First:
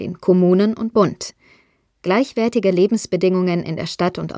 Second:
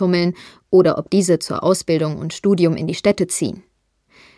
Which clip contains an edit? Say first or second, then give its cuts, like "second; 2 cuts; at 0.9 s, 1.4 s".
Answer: first; 1 cut; at 0.9 s